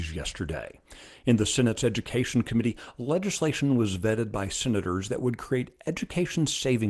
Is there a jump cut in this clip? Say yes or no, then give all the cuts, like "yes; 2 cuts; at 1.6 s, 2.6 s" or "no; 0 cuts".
no; 0 cuts